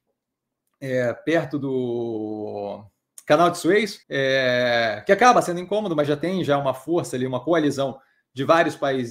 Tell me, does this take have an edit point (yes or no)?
yes